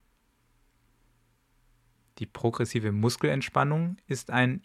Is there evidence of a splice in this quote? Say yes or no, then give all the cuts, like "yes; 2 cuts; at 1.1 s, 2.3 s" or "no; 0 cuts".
no; 0 cuts